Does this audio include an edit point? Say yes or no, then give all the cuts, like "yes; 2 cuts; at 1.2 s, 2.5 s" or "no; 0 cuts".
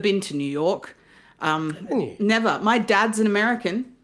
no; 0 cuts